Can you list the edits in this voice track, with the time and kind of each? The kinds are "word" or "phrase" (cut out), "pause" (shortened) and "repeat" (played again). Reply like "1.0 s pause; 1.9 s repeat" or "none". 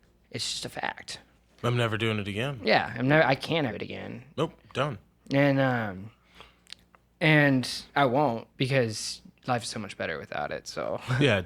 1.3 s pause; 3.7 s phrase; 8.5 s pause